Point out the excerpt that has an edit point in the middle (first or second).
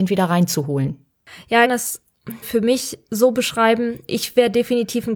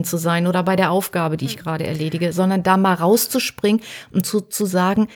first